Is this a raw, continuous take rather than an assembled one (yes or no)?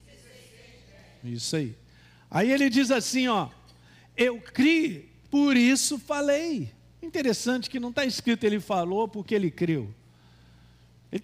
yes